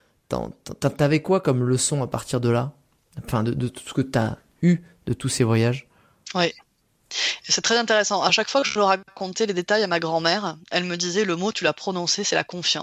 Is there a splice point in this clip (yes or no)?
no